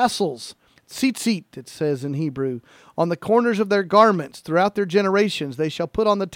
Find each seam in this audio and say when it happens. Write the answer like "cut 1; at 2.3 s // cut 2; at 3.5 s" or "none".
none

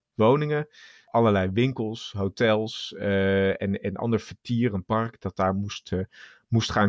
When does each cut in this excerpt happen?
none

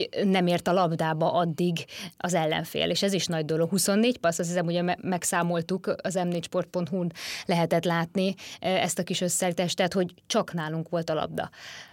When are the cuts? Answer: none

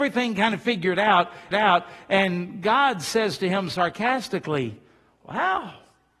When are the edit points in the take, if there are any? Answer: cut 1; at 1.5 s

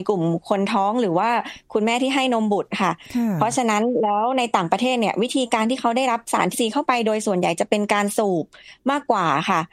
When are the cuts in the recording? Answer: cut 1; at 6.5 s

